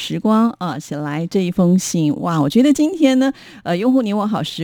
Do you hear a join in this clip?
no; 0 cuts

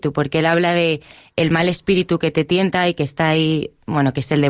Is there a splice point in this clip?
no; 0 cuts

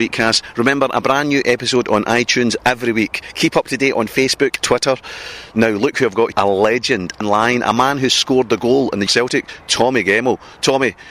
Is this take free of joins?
no; 4 cuts; at 4.6 s, 6.3 s, 7.2 s, 9.1 s

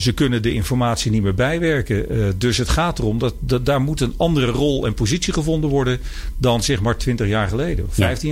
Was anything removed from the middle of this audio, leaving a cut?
no; 0 cuts

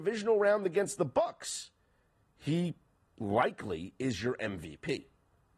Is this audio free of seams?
yes; 0 cuts

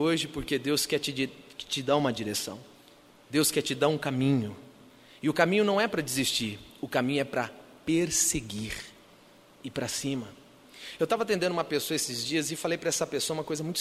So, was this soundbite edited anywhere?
no; 0 cuts

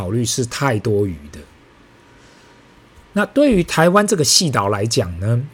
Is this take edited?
no; 0 cuts

